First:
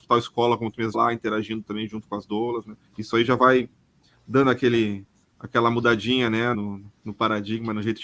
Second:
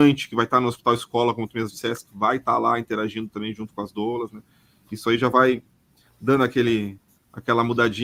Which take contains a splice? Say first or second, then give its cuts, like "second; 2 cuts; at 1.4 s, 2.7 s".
first; 3 cuts; at 0.9 s, 2.9 s, 6.5 s